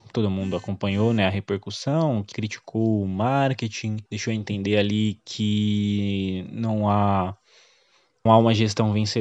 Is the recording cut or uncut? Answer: cut